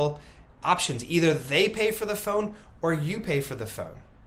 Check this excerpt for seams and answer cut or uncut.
uncut